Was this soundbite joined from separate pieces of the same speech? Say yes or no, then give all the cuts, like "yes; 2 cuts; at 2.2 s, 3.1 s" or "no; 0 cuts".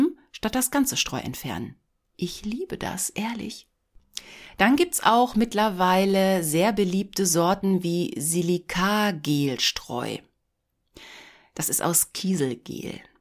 no; 0 cuts